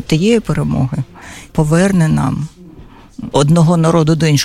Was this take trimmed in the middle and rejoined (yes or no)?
yes